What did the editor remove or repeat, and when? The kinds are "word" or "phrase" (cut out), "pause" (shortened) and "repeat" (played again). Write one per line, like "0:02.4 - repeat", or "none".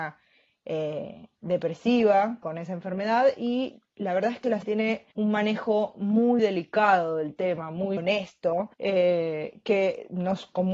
0:02.4 - phrase
0:04.6 - word
0:05.1 - pause
0:06.4 - word
0:08.0 - word
0:08.7 - pause